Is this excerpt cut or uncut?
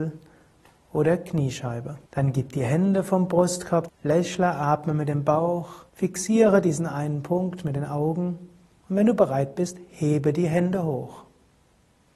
cut